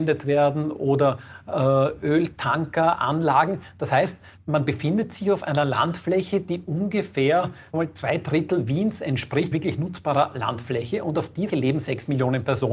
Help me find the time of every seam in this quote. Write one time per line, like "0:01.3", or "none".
0:07.7
0:09.5
0:11.5